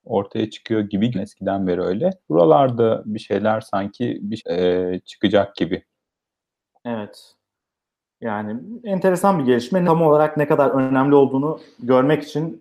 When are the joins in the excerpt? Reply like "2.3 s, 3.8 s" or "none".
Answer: 1.1 s, 2.2 s, 4.4 s, 9.9 s